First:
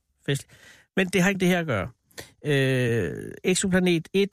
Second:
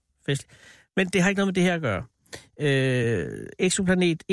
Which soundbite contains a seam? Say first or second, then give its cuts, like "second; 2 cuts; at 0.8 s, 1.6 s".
first; 1 cut; at 1.3 s